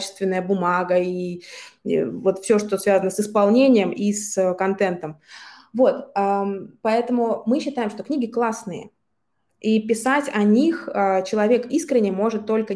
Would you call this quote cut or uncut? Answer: uncut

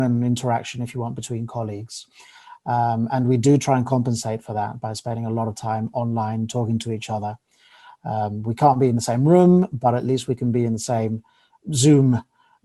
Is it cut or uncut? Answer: uncut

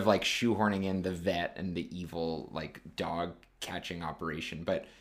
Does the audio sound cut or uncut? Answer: uncut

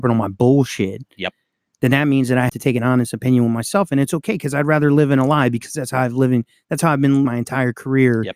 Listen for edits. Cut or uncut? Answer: cut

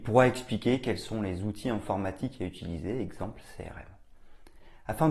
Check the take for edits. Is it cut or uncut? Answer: uncut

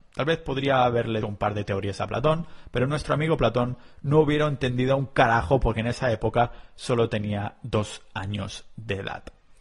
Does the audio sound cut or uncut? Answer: cut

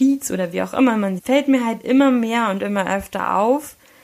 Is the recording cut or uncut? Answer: cut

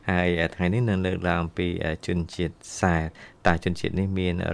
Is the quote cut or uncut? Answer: uncut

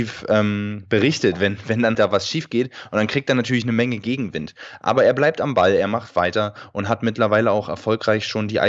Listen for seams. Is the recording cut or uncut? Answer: cut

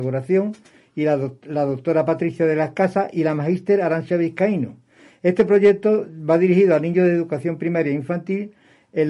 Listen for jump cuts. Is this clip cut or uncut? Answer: uncut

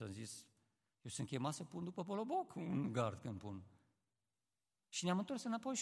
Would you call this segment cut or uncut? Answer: uncut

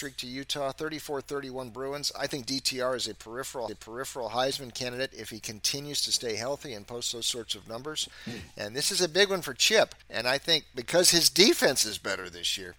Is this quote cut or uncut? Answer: cut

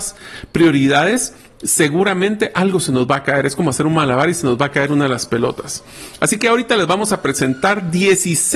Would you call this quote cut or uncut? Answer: uncut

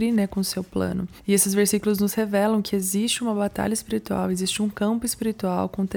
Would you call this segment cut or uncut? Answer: uncut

